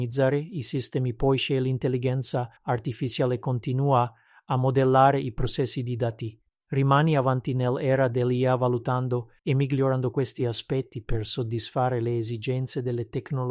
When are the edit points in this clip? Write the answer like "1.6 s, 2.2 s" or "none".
2.6 s, 9.4 s

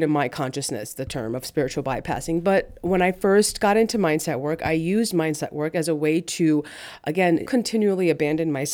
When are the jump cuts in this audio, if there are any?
7.5 s

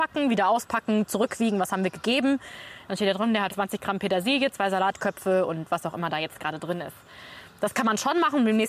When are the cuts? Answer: 3.5 s

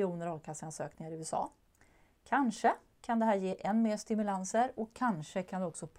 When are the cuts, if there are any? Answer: none

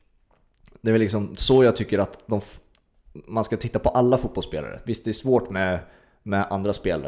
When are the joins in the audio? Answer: none

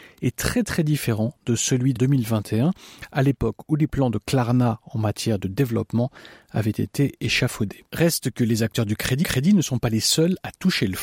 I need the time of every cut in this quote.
2.0 s, 7.9 s, 9.2 s

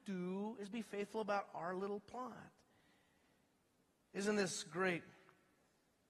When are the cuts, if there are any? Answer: none

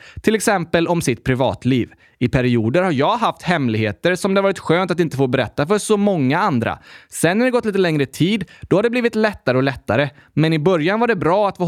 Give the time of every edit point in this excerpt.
none

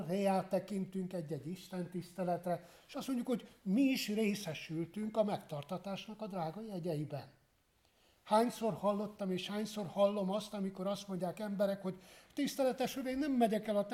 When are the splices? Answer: none

